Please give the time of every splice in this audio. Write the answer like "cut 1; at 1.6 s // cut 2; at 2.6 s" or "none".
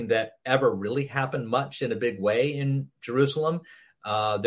none